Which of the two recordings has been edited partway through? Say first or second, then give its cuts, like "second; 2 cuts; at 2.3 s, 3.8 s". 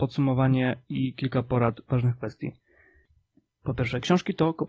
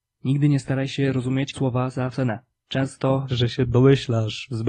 second; 3 cuts; at 1.5 s, 2.1 s, 3.3 s